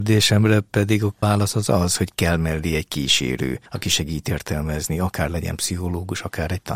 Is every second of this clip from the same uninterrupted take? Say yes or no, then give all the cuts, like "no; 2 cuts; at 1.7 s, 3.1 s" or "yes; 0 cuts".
yes; 0 cuts